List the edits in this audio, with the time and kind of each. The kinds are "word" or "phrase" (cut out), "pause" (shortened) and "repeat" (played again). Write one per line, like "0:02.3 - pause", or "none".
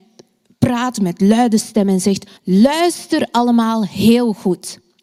0:02.4 - pause